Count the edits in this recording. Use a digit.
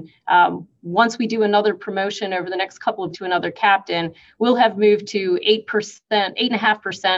1